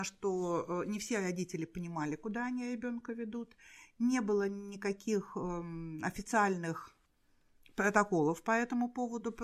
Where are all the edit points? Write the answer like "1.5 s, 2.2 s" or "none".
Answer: none